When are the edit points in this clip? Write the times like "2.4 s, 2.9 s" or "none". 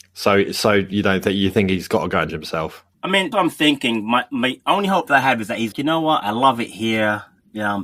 2.3 s, 2.9 s, 3.3 s, 5.7 s

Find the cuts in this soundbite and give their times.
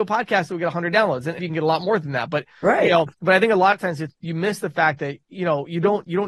1.4 s, 3.1 s, 4.1 s

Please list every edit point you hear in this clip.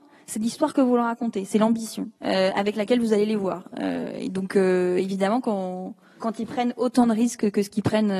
2.2 s

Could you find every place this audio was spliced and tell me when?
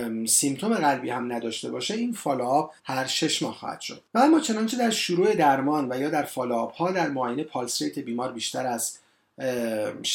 2.8 s, 4.1 s

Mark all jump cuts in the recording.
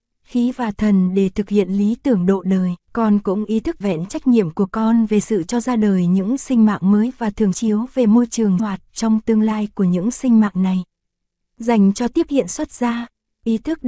2.8 s, 3.8 s, 7.5 s, 8.6 s

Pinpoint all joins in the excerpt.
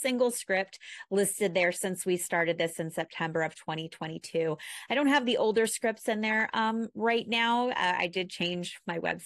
none

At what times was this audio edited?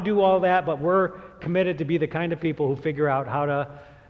none

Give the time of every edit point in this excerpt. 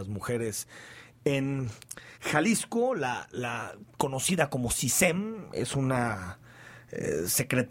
2.1 s, 3.9 s

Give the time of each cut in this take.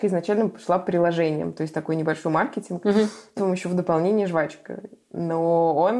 3.4 s

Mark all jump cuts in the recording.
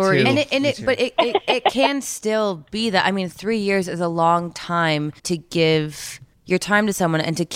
5.2 s, 6.3 s

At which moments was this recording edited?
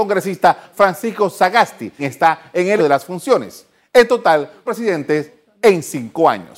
2.0 s, 2.8 s, 4.7 s

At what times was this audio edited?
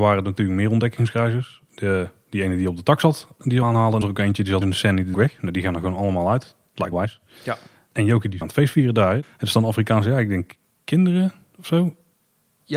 3.6 s, 4.0 s, 4.6 s, 5.1 s, 6.9 s, 8.4 s

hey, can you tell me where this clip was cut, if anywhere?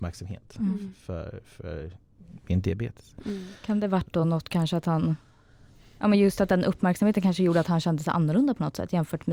none

